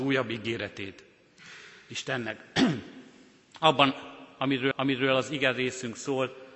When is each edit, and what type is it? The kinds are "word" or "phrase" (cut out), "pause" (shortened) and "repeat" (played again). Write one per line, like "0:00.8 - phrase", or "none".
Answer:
0:04.7 - repeat